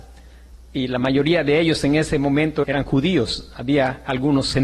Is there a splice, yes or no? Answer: yes